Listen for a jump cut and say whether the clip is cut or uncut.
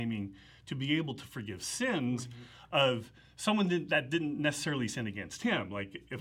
uncut